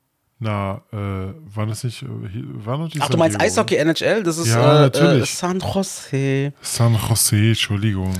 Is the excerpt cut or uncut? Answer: uncut